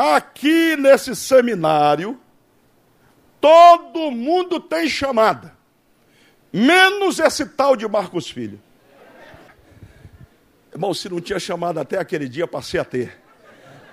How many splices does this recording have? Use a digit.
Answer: 0